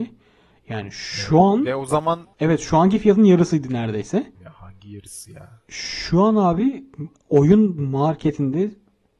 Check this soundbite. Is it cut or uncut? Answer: cut